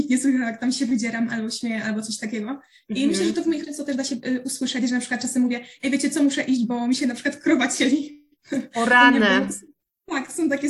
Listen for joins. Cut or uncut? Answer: cut